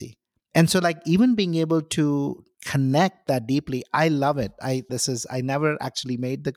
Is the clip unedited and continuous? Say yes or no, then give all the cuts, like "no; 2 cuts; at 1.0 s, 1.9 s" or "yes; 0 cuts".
no; 1 cut; at 4.9 s